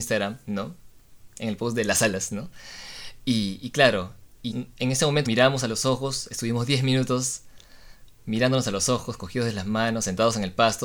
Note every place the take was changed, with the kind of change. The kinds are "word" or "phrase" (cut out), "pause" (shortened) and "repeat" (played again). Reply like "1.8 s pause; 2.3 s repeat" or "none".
4.5 s word; 5.3 s word

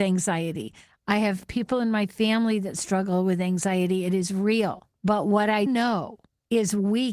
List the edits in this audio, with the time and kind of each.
5.7 s word

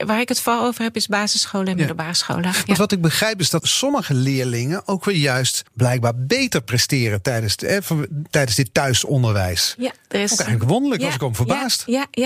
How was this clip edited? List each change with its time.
3.6 s word; 5.7 s pause

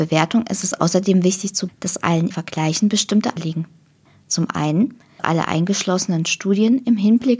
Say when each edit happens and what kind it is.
1.7 s word; 2.3 s word; 3.4 s phrase; 5.2 s word

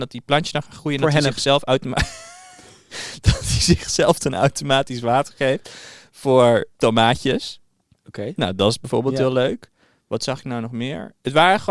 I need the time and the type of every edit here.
6.7 s pause

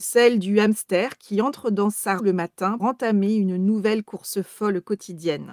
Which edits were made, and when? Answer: 2.2 s word; 2.8 s word

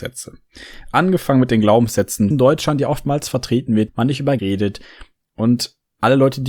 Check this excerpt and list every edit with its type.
2.3 s phrase; 3.9 s word; 4.4 s word

